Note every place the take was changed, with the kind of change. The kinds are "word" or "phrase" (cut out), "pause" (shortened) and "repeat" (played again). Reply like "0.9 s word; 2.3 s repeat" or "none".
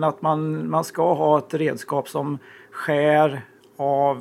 none